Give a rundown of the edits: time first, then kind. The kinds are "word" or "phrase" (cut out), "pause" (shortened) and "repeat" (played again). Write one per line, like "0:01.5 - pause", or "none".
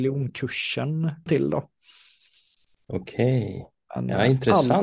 0:01.3 - word